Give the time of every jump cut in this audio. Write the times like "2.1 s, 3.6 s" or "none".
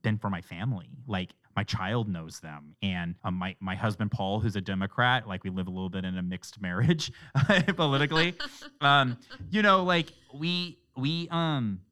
1.4 s, 3.2 s